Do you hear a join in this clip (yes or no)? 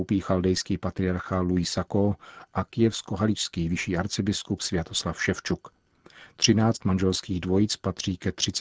no